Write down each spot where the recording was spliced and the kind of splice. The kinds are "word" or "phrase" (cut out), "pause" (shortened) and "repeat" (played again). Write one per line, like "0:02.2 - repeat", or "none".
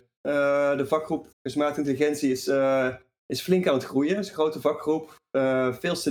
0:01.3 - pause